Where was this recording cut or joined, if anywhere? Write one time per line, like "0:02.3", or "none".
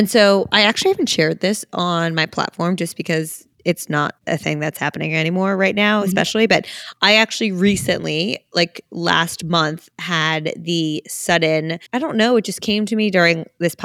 0:03.5
0:04.2
0:11.9

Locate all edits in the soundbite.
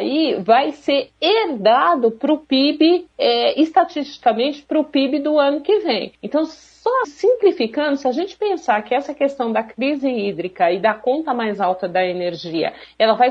0:06.1
0:07.0

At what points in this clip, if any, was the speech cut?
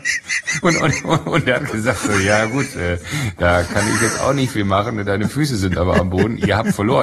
none

